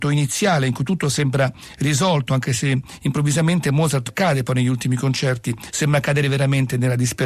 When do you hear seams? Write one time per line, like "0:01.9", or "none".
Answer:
0:04.1